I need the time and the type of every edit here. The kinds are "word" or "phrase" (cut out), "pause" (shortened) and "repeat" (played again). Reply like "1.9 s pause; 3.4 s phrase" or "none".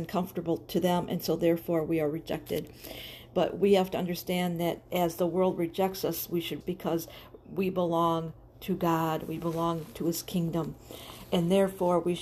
6.6 s word